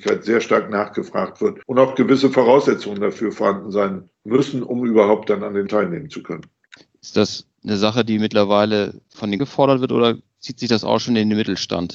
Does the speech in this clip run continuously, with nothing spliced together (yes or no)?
no